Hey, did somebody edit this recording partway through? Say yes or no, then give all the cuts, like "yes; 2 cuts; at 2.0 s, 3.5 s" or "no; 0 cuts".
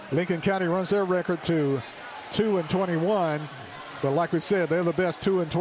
no; 0 cuts